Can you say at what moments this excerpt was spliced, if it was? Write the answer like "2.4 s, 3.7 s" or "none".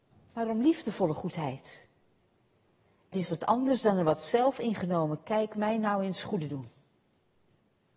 3.1 s, 6.5 s